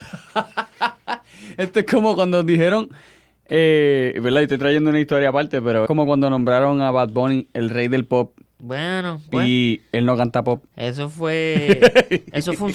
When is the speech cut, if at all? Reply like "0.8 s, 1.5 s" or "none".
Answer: 5.9 s, 8.5 s, 10.7 s